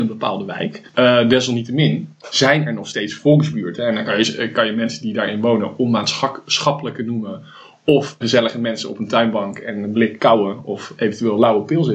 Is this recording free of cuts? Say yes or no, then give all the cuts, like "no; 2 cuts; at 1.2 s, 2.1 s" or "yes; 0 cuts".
no; 2 cuts; at 8.2 s, 10.2 s